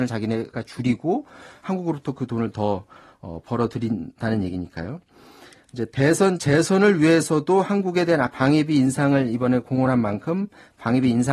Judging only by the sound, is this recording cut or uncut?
uncut